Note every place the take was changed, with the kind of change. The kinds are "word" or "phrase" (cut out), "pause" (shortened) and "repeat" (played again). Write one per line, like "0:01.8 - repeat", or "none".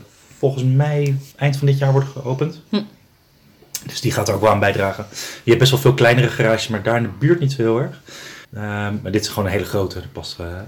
0:01.3 - pause
0:08.4 - pause